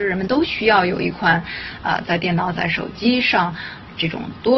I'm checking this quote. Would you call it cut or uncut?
uncut